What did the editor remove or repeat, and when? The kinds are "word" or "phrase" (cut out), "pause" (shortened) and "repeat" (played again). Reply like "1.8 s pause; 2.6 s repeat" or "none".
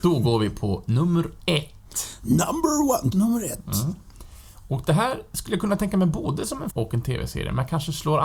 3.1 s word; 6.7 s word